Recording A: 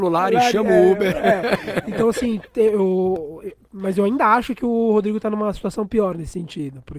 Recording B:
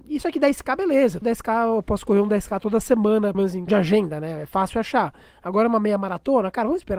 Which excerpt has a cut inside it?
B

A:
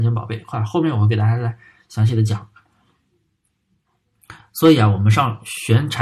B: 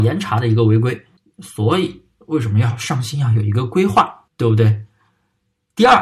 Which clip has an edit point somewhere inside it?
B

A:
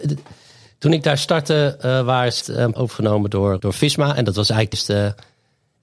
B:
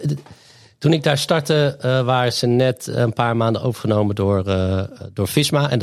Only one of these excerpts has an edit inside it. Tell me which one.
A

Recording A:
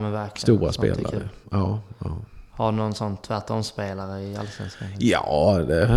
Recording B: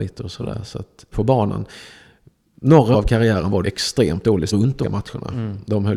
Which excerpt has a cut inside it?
B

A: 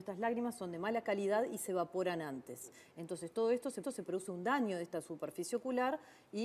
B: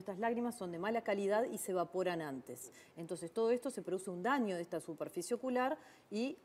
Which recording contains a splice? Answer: A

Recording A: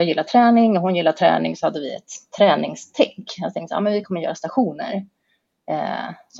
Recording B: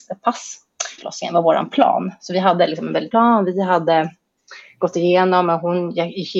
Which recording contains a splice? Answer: B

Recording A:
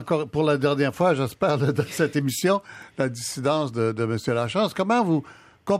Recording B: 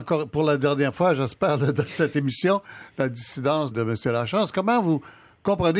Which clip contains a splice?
B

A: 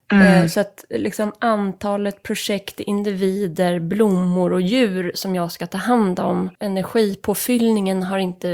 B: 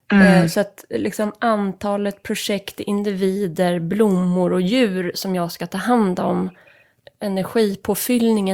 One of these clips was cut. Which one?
A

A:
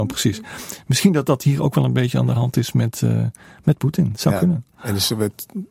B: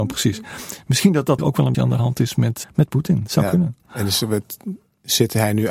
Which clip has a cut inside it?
B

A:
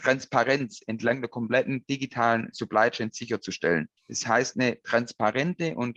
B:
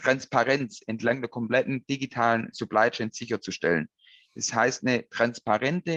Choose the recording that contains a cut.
A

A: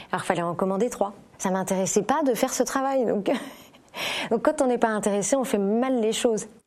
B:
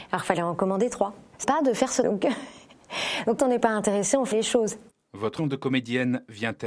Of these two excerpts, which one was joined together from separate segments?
B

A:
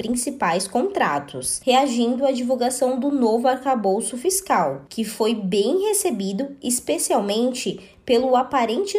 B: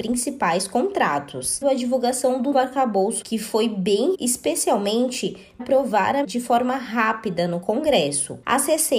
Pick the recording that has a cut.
B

